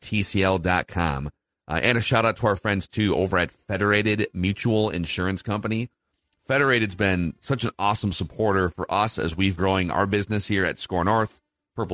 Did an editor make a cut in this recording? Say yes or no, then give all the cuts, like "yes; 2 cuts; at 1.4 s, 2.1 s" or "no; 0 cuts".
yes; 1 cut; at 9.6 s